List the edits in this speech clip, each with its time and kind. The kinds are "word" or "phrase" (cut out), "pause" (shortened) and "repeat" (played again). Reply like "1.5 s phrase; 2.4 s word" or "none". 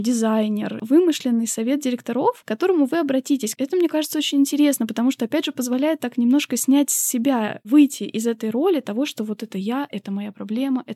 none